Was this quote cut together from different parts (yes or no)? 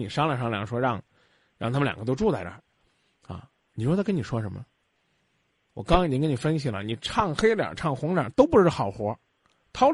no